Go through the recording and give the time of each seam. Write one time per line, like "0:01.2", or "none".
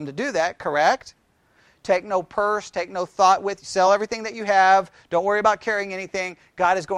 none